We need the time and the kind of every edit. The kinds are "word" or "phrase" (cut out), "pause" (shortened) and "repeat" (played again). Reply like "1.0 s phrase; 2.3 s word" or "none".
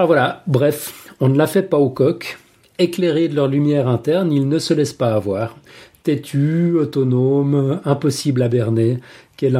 none